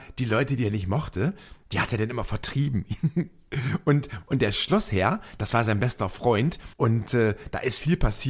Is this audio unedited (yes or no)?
no